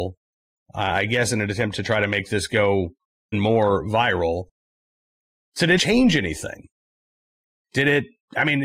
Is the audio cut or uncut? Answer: cut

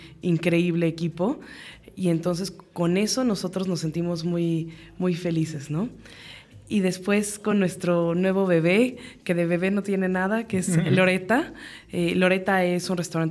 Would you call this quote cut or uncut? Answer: uncut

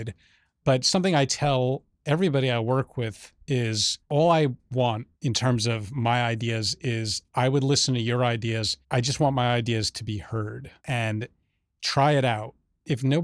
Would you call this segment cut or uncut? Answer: cut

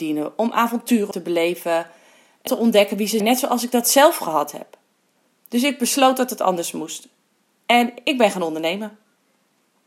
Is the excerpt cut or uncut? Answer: cut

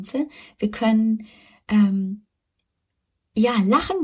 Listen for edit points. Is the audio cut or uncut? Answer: uncut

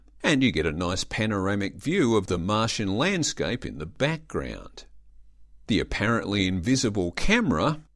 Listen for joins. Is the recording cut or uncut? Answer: uncut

